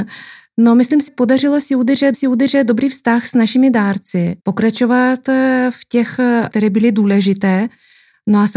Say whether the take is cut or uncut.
cut